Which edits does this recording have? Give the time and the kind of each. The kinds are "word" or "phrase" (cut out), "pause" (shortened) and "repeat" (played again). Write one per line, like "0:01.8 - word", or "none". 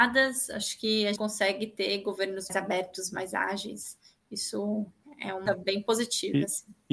0:01.2 - word
0:02.5 - word
0:05.5 - word